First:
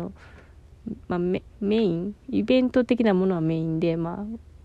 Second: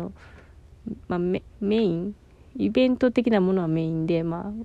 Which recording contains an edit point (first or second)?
first